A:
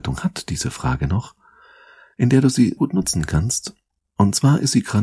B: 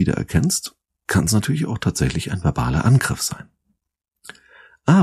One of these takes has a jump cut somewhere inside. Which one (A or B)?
A